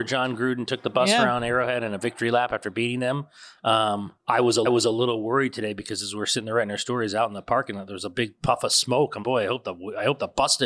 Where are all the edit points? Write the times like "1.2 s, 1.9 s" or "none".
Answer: 4.2 s, 4.7 s, 9.2 s